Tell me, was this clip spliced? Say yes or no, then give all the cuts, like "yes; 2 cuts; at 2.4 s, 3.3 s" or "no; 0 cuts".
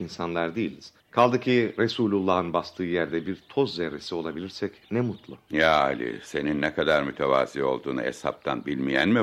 yes; 1 cut; at 1.0 s